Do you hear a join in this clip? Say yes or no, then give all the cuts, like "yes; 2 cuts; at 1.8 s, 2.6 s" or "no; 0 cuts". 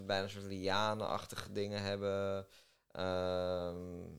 no; 0 cuts